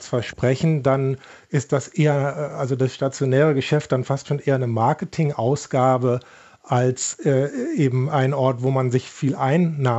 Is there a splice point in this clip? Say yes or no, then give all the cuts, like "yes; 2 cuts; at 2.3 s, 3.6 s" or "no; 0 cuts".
no; 0 cuts